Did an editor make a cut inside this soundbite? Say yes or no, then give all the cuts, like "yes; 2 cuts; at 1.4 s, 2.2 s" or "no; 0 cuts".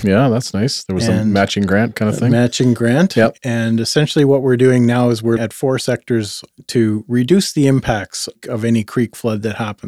yes; 1 cut; at 5.4 s